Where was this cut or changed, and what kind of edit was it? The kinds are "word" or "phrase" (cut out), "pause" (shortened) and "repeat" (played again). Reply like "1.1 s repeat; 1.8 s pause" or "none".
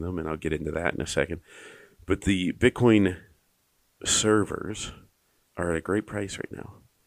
5.5 s word